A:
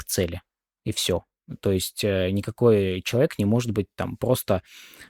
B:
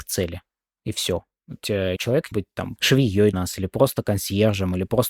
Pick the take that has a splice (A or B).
B